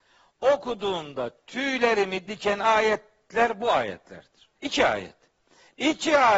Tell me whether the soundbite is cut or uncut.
cut